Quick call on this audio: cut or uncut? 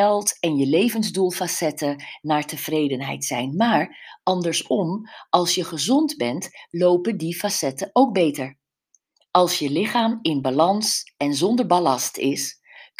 uncut